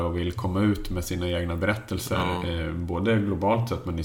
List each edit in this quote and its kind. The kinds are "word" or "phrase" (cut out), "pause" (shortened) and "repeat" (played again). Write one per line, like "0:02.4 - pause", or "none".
none